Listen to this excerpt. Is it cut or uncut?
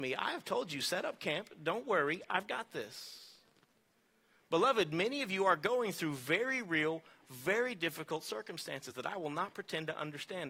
uncut